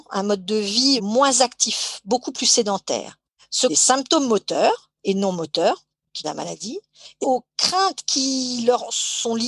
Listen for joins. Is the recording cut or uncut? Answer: cut